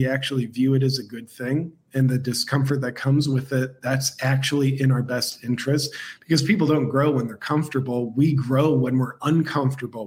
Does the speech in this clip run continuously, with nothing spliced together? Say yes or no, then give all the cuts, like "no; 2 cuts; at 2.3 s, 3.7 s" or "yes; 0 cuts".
yes; 0 cuts